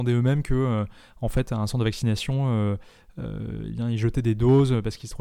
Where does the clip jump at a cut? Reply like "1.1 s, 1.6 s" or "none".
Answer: none